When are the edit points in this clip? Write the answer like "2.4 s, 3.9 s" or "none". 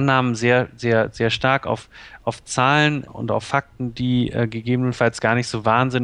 3.1 s